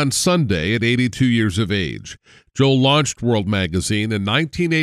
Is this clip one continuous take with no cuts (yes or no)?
yes